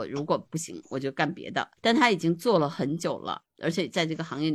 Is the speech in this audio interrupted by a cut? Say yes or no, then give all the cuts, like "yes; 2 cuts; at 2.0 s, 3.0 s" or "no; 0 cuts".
yes; 1 cut; at 1.8 s